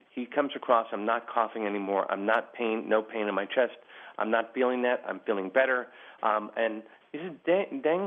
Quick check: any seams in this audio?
no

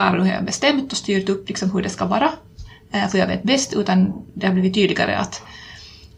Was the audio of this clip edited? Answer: no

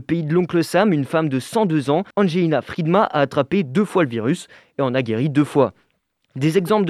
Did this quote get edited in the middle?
yes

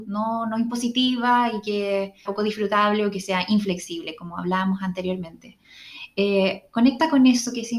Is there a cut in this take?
yes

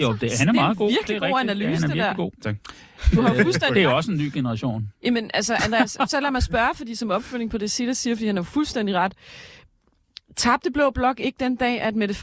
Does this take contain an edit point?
no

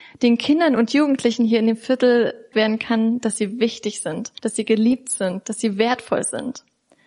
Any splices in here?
yes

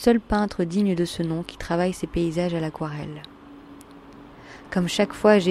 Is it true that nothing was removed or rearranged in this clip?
yes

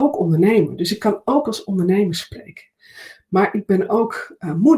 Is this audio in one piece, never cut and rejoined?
yes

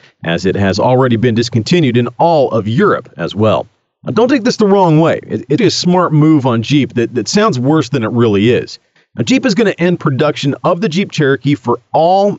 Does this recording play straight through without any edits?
no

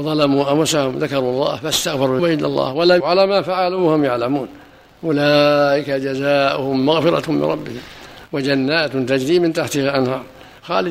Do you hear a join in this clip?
yes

